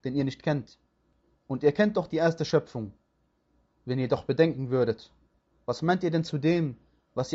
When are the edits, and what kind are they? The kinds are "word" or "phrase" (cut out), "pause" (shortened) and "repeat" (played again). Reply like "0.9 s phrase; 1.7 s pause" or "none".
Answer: none

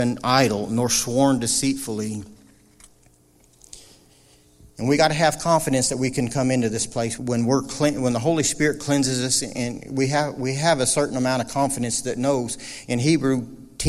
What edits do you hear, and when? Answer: 7.2 s word

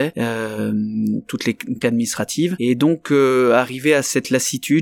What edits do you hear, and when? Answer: 1.8 s word

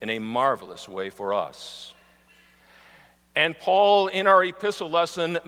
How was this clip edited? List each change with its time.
none

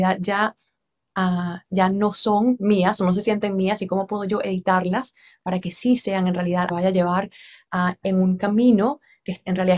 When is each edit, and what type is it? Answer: 6.7 s phrase

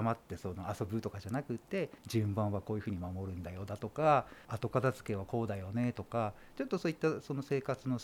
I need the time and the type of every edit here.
2.0 s pause; 4.4 s pause

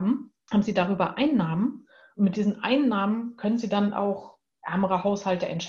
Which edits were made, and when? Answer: none

